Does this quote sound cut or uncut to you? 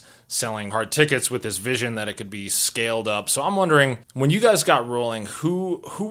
cut